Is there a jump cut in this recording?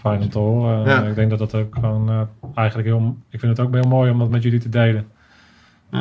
no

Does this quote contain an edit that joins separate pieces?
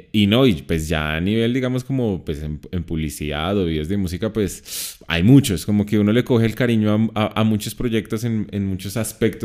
no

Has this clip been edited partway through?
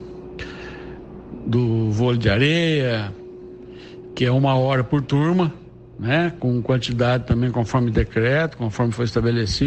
no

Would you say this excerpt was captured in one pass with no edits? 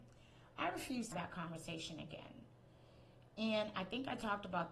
no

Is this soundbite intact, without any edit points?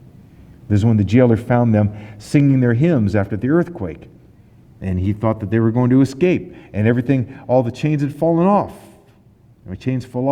yes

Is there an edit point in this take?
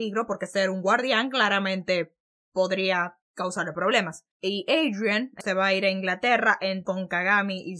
yes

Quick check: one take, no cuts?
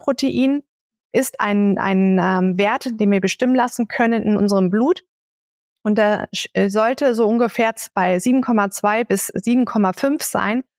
yes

